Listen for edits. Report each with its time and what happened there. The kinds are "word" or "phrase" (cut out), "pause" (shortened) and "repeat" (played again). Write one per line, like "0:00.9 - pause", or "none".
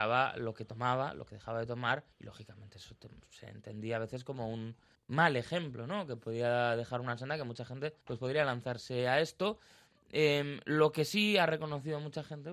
0:02.1 - pause
0:04.9 - pause
0:08.0 - pause